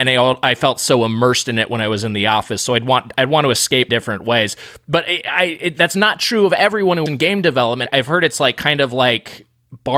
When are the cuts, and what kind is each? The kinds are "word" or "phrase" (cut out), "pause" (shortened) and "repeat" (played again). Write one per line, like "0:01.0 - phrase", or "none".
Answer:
0:03.9 - word
0:07.1 - word
0:07.9 - word